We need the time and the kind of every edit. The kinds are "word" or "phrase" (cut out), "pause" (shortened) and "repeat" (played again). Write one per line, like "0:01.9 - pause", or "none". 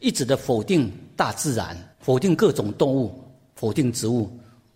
0:01.9 - pause